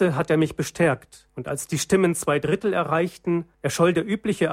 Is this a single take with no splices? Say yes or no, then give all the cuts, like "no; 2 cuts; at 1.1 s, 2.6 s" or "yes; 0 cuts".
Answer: no; 2 cuts; at 1.3 s, 3.5 s